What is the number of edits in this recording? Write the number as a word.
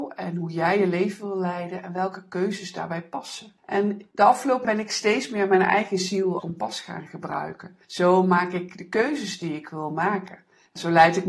three